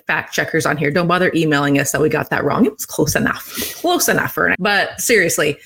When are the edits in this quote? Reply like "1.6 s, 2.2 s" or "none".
4.5 s

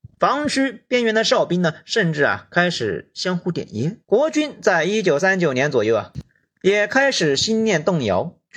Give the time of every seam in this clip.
4.0 s

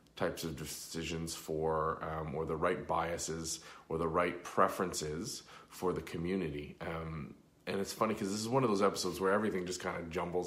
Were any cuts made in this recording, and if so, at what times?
none

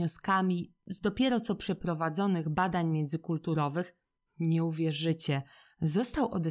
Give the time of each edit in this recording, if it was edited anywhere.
none

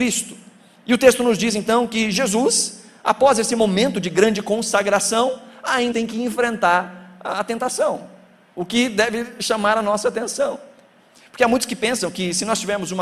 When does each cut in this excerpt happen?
5.9 s

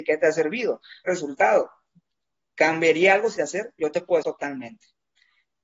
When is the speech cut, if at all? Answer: 1.1 s, 3.3 s, 4.2 s

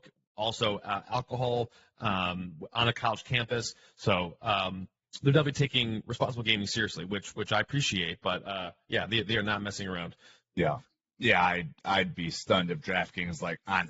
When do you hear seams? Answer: none

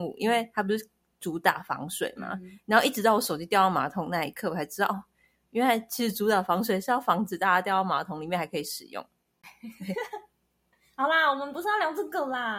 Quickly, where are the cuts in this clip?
none

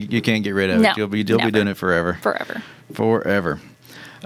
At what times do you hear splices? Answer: none

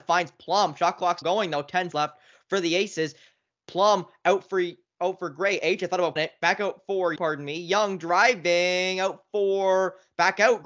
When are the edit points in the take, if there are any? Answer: 1.2 s, 1.9 s, 6.2 s, 7.2 s

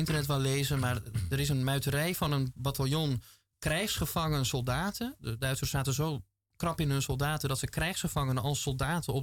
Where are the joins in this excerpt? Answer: none

